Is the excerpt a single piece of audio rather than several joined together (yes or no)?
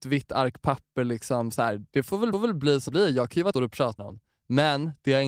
no